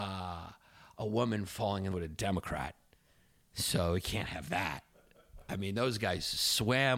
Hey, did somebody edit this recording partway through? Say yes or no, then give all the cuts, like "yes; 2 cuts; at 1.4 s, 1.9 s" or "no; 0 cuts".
yes; 1 cut; at 1.9 s